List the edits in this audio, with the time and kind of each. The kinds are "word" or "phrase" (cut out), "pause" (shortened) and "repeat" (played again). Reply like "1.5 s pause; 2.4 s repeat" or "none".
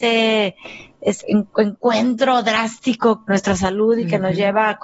1.2 s word